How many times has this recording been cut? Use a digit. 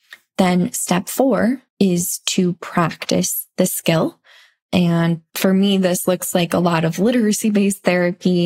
1